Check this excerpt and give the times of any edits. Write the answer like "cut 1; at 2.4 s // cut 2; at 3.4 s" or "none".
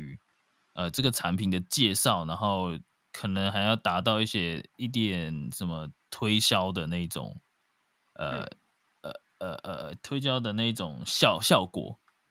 none

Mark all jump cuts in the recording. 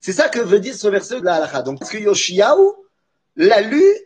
cut 1; at 1.2 s // cut 2; at 1.8 s

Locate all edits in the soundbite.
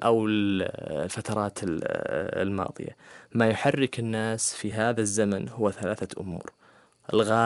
none

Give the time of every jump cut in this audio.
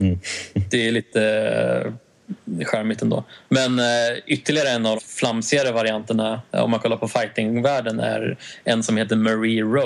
cut 1; at 5.0 s

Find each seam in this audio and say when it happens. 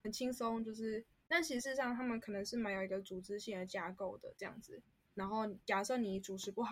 none

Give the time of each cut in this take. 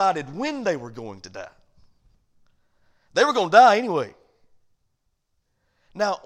none

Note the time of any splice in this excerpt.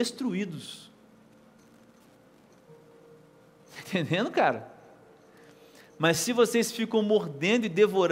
none

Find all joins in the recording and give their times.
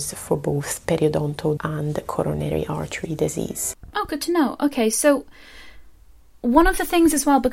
cut 1; at 1.6 s

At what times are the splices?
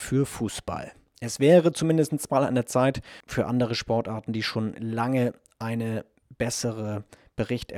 none

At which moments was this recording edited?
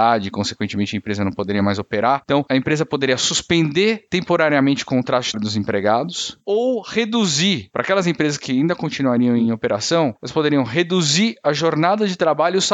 cut 1; at 5.3 s

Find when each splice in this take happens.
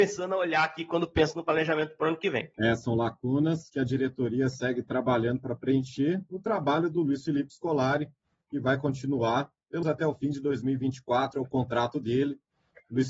cut 1; at 9.8 s

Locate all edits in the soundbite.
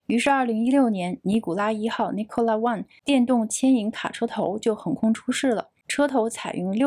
none

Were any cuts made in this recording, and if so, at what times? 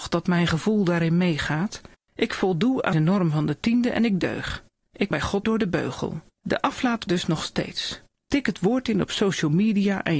cut 1; at 2.0 s // cut 2; at 2.9 s // cut 3; at 5.1 s // cut 4; at 5.4 s // cut 5; at 6.3 s // cut 6; at 7.1 s

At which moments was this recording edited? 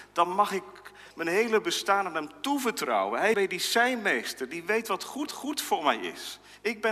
cut 1; at 3.3 s // cut 2; at 5.3 s

